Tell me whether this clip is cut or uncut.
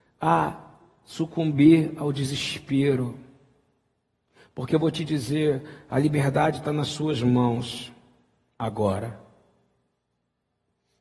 uncut